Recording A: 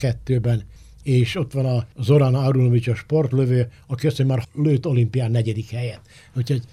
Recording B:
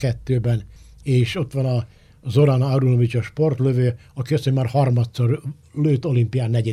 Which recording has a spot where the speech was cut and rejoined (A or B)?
A